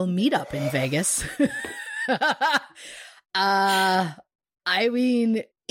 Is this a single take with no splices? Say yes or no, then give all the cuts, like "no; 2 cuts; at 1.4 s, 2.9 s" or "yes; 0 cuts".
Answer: yes; 0 cuts